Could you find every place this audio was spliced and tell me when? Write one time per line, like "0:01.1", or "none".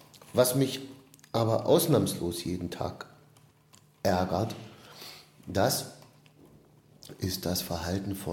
none